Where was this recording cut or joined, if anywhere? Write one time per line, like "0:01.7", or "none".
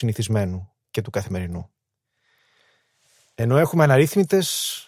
none